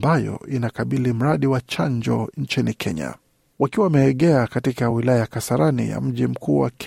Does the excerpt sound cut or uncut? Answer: uncut